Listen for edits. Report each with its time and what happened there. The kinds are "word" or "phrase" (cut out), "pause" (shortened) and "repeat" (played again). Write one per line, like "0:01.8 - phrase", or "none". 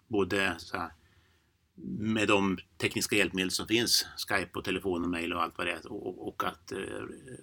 none